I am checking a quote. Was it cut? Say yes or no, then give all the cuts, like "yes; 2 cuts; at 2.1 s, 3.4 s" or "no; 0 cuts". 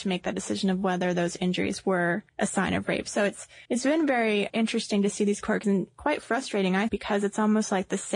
yes; 5 cuts; at 2.3 s, 3.6 s, 4.5 s, 5.6 s, 6.9 s